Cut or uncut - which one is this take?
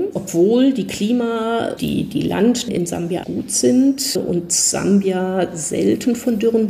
cut